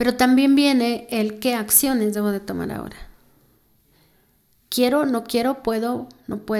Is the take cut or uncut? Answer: uncut